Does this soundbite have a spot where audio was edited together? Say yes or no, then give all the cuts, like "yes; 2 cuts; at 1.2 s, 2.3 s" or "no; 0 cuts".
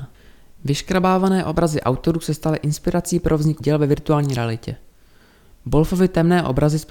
yes; 1 cut; at 3.6 s